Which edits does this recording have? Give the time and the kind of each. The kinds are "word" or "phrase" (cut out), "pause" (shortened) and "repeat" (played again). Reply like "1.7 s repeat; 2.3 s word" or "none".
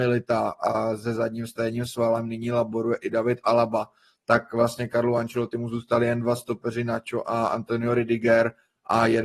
none